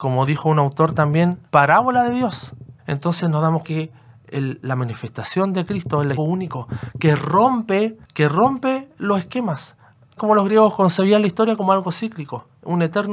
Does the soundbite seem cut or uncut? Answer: cut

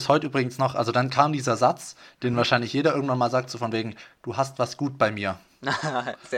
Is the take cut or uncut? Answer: uncut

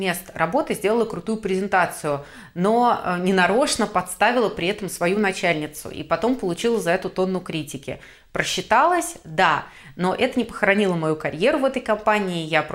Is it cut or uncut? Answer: uncut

